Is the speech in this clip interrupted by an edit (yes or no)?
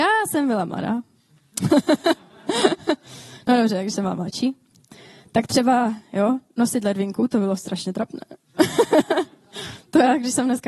no